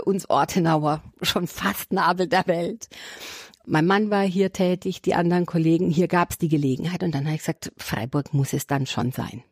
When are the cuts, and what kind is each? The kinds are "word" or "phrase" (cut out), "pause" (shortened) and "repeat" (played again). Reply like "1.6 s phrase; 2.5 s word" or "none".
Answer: 1.1 s pause